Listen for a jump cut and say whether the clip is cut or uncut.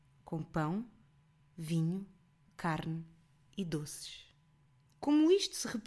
uncut